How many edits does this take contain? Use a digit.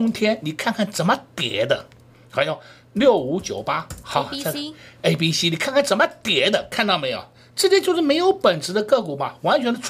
0